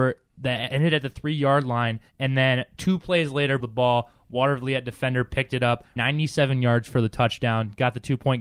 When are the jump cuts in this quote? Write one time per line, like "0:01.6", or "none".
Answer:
0:02.1
0:03.6
0:06.0